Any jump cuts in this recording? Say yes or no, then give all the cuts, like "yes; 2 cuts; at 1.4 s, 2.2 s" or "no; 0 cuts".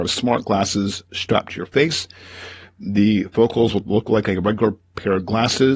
no; 0 cuts